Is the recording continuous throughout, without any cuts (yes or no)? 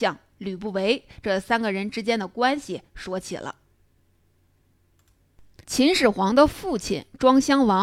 no